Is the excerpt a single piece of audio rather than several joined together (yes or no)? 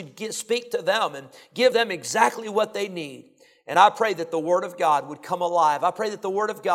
yes